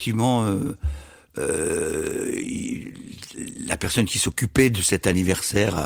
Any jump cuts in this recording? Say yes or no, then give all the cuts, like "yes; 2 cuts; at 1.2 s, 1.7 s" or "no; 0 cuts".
no; 0 cuts